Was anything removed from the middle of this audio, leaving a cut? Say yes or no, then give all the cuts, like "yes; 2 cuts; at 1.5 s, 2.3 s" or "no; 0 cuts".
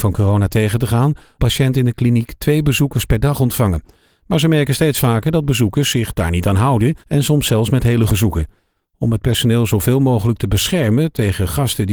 yes; 3 cuts; at 1.4 s, 7.0 s, 8.1 s